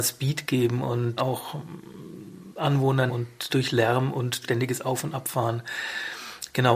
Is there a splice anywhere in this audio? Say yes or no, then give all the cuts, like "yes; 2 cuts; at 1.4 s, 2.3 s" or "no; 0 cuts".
yes; 4 cuts; at 1.2 s, 3.1 s, 3.5 s, 4.4 s